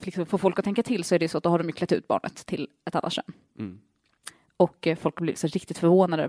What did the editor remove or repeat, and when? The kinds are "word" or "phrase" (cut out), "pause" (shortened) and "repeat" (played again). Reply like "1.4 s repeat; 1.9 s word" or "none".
none